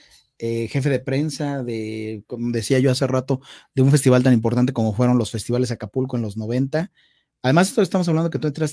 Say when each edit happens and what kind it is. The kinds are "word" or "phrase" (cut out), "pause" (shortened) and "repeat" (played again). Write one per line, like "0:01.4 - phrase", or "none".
none